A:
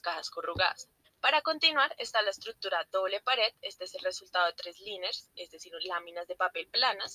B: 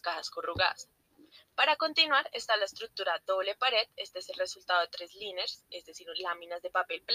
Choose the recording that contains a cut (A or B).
A